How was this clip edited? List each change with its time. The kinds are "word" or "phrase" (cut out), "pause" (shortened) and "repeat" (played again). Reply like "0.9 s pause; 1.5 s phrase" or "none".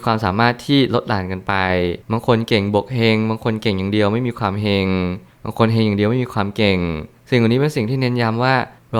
2.0 s pause